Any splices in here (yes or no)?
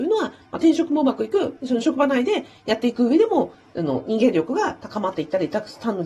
no